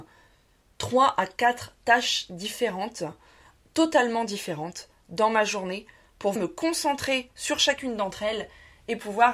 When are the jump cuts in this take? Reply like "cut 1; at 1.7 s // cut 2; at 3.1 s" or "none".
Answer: cut 1; at 6.4 s